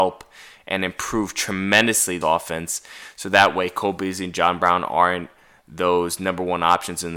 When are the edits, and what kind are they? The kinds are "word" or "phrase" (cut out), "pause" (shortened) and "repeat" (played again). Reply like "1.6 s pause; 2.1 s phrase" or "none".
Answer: 2.2 s word